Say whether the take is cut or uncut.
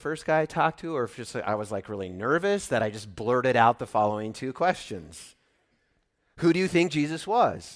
uncut